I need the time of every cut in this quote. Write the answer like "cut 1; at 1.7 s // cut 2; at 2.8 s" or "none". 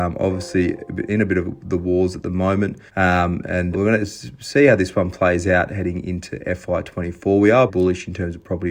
cut 1; at 2.9 s // cut 2; at 3.7 s // cut 3; at 7.7 s